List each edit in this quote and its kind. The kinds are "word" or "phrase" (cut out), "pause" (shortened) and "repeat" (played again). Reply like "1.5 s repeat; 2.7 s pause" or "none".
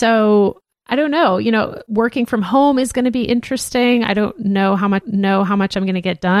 5.0 s repeat